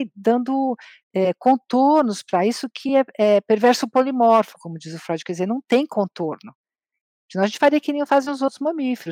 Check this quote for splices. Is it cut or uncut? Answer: uncut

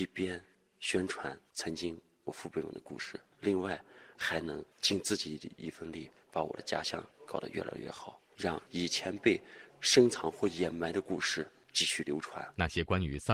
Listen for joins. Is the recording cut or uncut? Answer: cut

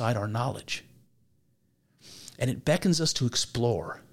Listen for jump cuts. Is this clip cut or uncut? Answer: uncut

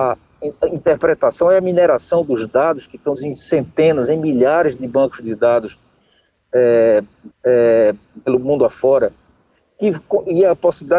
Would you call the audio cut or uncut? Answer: cut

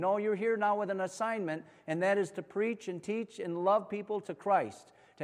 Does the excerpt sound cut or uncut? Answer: uncut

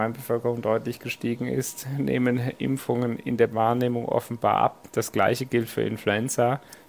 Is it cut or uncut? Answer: cut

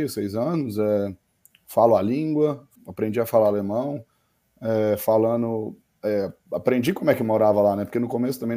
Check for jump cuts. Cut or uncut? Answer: cut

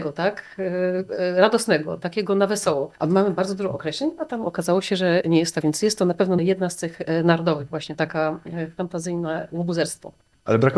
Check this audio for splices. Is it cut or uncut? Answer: cut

